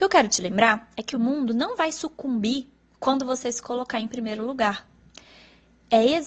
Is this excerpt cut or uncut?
uncut